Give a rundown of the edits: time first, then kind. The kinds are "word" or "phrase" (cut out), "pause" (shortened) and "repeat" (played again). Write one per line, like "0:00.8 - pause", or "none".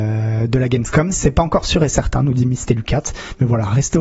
none

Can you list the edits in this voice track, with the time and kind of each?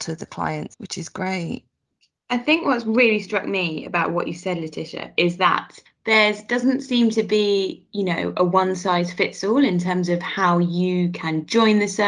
none

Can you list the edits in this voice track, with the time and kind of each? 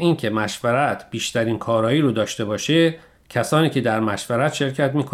none

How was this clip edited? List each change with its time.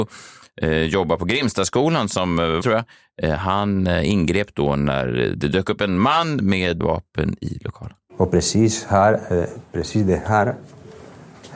0:02.6 - word
0:06.8 - word

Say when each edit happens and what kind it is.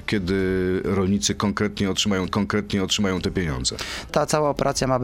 0:02.3 - repeat
0:04.1 - phrase

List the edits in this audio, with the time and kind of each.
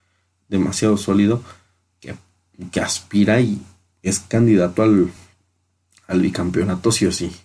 none

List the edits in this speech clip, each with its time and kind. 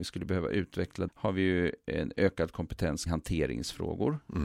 0:01.1 - word
0:03.1 - word

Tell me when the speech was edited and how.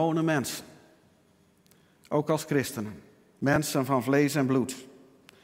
none

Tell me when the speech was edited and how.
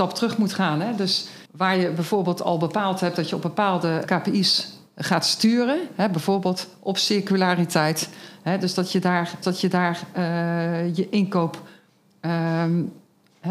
0:01.5 - pause
0:04.1 - word
0:09.4 - repeat

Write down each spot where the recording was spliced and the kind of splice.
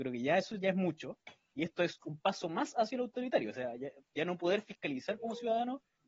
none

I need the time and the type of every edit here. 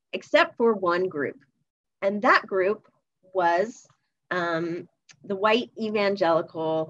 none

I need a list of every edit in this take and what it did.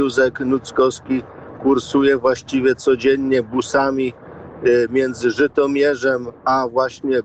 none

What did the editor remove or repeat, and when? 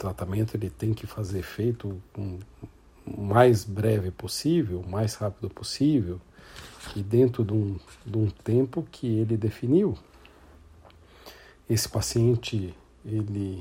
none

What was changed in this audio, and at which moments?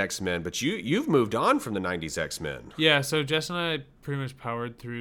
none

